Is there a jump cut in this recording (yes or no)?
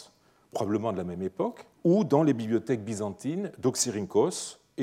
yes